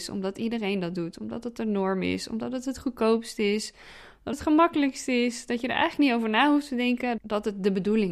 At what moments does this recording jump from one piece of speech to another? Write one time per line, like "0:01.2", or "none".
0:04.3
0:07.2